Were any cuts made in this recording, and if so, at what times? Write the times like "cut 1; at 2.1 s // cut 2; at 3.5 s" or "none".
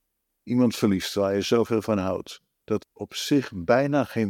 cut 1; at 2.8 s